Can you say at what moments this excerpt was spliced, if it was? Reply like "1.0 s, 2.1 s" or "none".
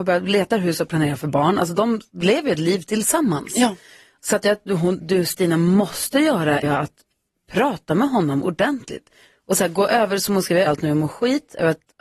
2.1 s, 5.0 s, 6.6 s, 10.7 s